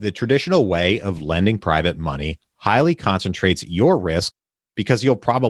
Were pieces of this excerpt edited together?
no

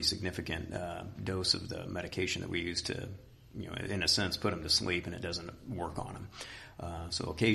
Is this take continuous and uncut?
yes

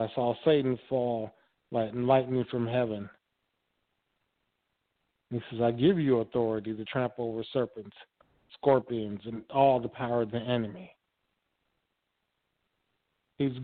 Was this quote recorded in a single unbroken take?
yes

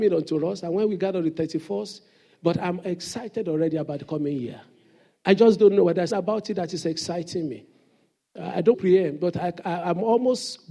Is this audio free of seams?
no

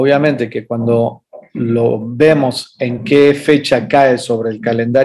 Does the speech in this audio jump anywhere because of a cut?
no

